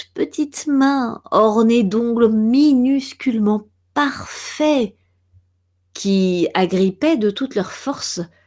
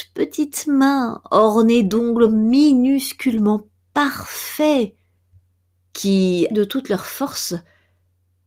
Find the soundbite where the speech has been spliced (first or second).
second